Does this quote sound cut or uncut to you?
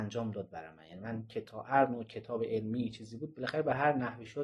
uncut